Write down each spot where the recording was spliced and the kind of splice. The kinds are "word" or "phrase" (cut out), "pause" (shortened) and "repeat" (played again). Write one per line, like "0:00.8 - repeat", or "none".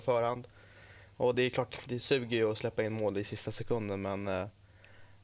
none